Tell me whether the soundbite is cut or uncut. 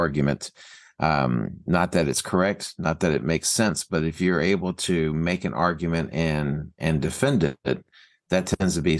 uncut